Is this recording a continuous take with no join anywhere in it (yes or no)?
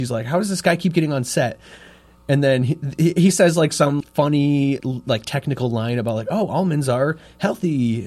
no